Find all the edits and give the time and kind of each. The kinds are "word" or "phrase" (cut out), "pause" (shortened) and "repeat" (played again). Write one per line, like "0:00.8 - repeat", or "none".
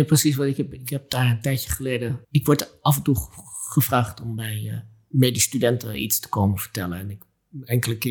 0:02.2 - pause

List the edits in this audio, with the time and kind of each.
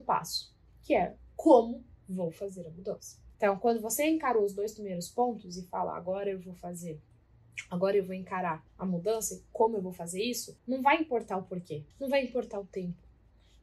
0:03.3 - pause
0:08.7 - pause
0:10.6 - pause
0:11.9 - pause

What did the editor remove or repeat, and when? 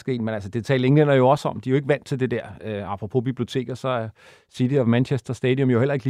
none

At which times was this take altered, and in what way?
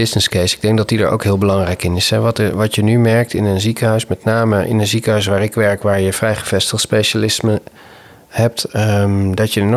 none

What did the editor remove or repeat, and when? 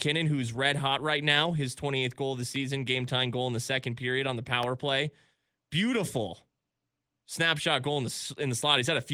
none

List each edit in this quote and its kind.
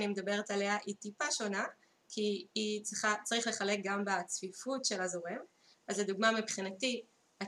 none

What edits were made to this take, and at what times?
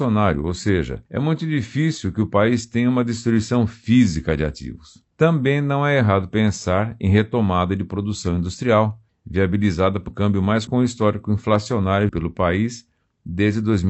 0:01.1 - pause
0:05.1 - pause
0:09.1 - pause
0:10.1 - word
0:10.7 - word
0:12.1 - word

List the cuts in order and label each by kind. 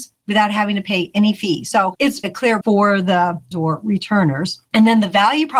0:02.2 - word
0:02.6 - word
0:03.5 - word

